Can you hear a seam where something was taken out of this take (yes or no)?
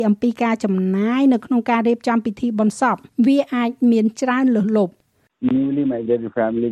no